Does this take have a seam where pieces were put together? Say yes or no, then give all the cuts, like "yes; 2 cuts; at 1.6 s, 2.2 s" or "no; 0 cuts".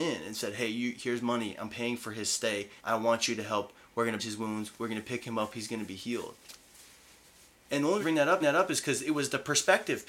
yes; 4 cuts; at 2.8 s, 4.2 s, 8.0 s, 8.4 s